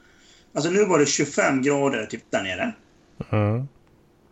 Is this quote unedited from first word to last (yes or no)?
no